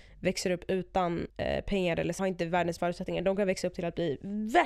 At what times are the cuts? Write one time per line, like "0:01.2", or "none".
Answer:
0:01.3
0:02.2
0:02.8